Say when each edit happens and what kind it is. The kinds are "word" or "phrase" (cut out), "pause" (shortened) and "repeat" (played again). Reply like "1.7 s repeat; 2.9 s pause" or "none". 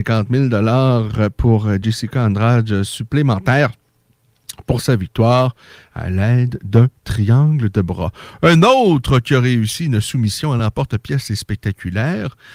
none